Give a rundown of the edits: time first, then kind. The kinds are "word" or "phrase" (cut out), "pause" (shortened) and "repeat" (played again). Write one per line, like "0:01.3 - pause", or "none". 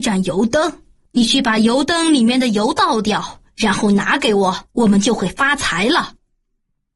0:04.7 - pause